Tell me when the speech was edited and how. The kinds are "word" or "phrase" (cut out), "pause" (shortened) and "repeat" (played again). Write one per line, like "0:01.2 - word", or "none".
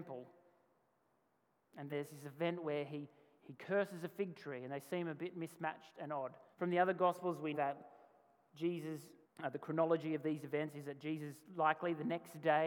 0:01.9 - word
0:03.4 - word
0:06.5 - pause
0:07.5 - word
0:09.2 - pause